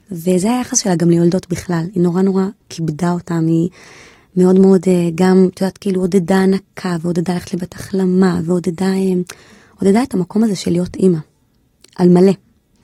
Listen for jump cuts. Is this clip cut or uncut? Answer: cut